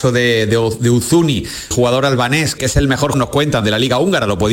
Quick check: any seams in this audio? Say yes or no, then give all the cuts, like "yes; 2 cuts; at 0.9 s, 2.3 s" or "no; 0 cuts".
yes; 4 cuts; at 1.7 s, 2.6 s, 3.1 s, 3.6 s